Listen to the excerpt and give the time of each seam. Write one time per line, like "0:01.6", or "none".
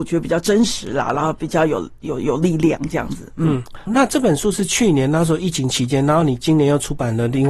0:03.9